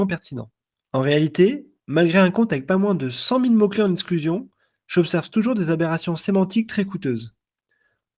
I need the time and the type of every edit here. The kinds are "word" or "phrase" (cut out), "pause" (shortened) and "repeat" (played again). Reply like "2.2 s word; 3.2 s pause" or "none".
none